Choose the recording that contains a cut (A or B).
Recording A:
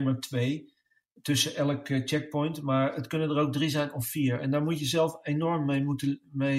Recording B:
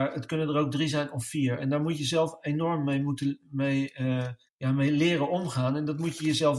B